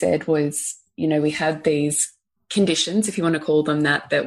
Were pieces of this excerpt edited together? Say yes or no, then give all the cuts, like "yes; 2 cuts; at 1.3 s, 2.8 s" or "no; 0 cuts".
no; 0 cuts